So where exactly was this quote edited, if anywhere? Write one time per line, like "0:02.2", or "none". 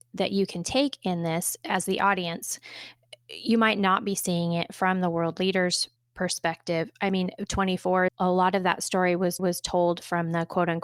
0:06.0
0:08.1
0:09.4